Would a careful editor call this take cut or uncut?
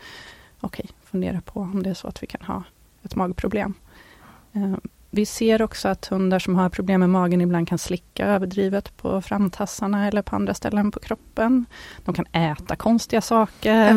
uncut